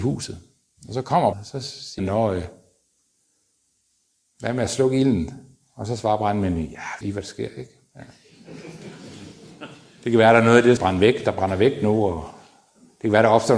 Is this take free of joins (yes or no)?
no